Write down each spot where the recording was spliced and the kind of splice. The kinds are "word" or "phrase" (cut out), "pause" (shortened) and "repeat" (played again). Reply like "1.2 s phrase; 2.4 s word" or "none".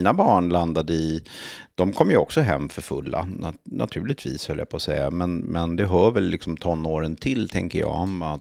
none